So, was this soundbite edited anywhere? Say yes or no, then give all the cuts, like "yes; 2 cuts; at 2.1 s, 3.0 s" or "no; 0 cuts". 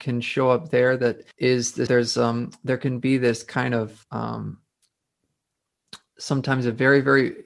yes; 3 cuts; at 1.3 s, 1.9 s, 4.0 s